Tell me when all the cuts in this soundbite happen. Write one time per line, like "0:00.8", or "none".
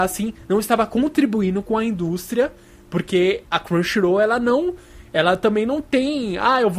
0:03.4

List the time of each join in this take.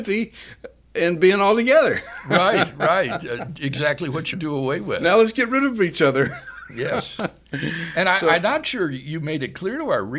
0:04.3

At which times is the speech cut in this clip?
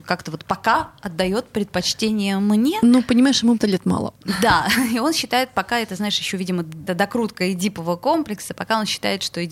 0:03.6
0:06.9

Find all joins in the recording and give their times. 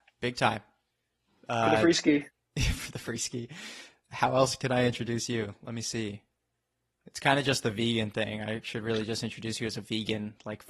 0:02.3

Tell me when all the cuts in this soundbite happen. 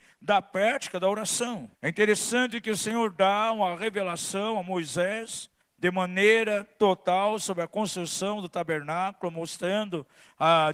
0:01.7
0:05.6

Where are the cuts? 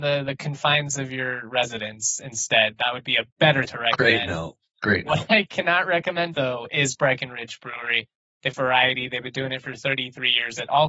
0:03.7
0:06.3
0:08.5

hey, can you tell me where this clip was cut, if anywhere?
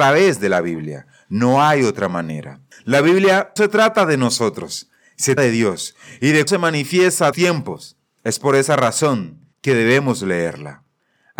0:02.7
0:03.6
0:05.4
0:06.5
0:07.3
0:09.5

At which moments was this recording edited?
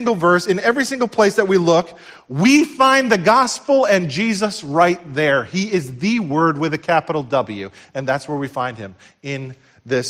none

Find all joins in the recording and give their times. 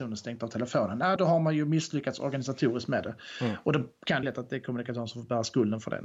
0:01.2
0:04.2

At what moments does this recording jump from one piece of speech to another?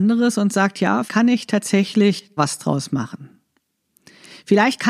0:01.1
0:02.4

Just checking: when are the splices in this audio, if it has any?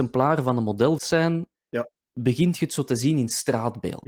0:01.0

